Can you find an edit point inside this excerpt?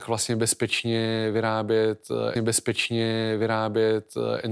yes; 1 cut; at 2.4 s

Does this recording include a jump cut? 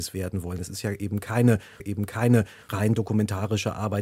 yes; 1 cut; at 1.8 s

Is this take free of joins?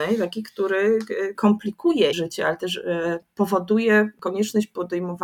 no; 2 cuts; at 1.3 s, 2.1 s

